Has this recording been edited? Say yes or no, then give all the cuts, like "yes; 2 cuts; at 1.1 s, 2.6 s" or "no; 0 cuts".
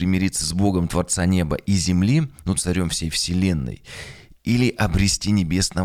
yes; 1 cut; at 2.6 s